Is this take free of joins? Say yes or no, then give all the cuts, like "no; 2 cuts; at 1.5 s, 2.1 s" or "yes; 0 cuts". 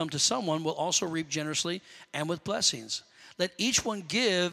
yes; 0 cuts